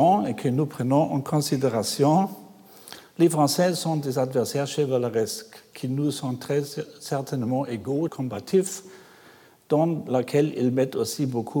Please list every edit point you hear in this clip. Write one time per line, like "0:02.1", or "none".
0:08.1